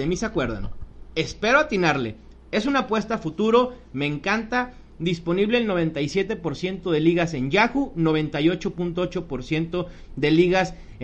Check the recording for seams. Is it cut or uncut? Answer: uncut